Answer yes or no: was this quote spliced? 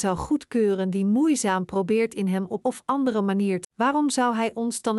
yes